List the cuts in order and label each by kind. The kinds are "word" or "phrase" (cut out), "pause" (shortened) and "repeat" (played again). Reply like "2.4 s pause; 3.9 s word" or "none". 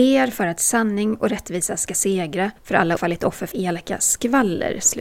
2.6 s pause; 3.0 s phrase; 3.5 s word